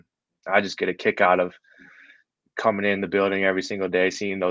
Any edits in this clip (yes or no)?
no